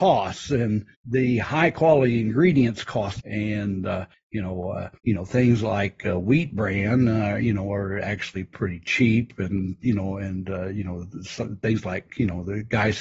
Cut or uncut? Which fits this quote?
cut